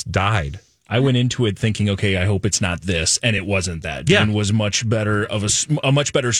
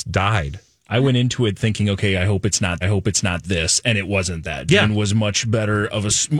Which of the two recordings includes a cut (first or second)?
second